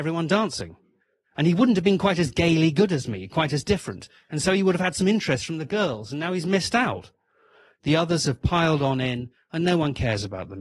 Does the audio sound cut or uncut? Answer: uncut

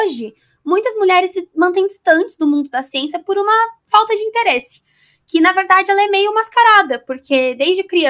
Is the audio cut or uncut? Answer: uncut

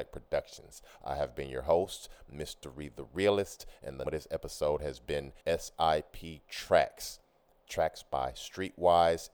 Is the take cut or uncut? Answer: cut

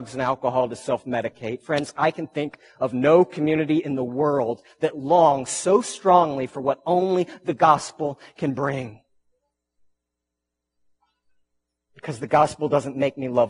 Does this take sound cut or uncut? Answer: uncut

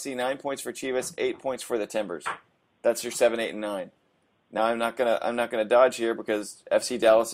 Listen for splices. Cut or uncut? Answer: uncut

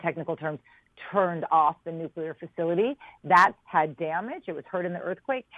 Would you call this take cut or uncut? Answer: cut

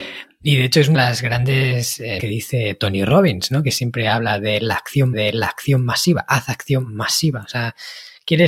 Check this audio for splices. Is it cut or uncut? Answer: cut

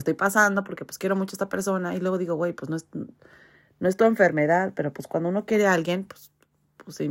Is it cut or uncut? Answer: uncut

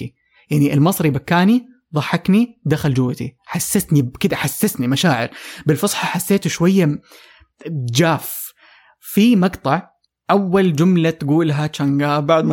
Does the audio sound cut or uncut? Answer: uncut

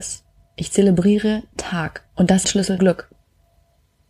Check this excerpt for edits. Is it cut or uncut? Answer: cut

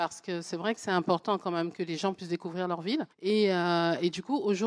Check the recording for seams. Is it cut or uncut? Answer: cut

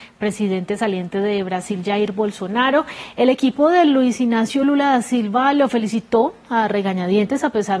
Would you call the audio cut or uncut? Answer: uncut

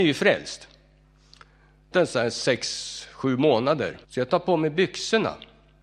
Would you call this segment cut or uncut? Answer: cut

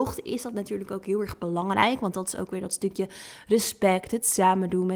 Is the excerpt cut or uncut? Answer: uncut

